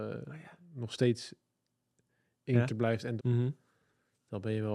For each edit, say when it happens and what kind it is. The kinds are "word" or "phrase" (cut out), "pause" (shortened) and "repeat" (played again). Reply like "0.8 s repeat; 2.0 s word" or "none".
2.7 s word; 3.2 s word